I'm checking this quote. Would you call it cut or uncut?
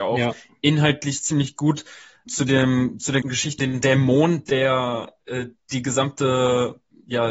cut